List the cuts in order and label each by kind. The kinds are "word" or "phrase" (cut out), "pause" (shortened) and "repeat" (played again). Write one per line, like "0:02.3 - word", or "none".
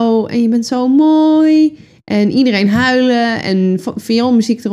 none